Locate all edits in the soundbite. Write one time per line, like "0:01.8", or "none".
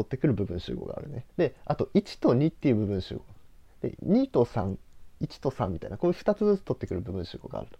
0:01.3